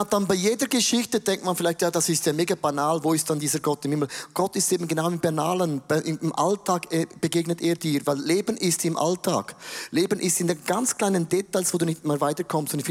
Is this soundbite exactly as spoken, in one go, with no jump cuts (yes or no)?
yes